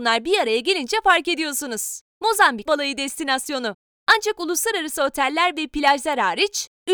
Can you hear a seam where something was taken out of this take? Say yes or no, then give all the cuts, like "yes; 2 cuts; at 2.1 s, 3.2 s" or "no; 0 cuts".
yes; 1 cut; at 2.7 s